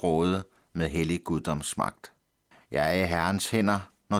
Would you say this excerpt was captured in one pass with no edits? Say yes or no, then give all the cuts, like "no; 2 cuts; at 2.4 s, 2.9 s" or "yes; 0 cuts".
no; 1 cut; at 2.5 s